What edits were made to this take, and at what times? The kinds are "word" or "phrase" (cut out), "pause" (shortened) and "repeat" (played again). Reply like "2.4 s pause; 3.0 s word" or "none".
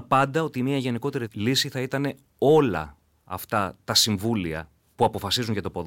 none